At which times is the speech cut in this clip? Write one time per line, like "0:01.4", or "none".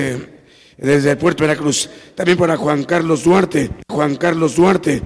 0:01.4
0:03.9